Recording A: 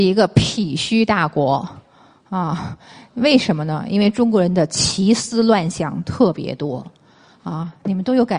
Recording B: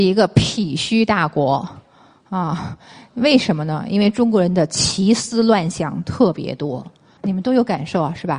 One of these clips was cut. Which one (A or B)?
B